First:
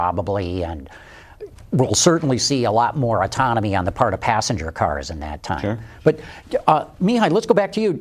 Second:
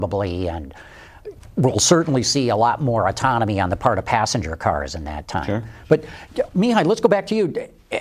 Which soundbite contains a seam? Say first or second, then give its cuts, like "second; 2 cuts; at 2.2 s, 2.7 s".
second; 1 cut; at 6.5 s